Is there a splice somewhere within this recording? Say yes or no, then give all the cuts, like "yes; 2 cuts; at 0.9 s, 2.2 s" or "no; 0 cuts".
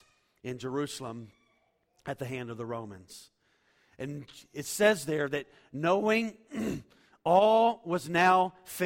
no; 0 cuts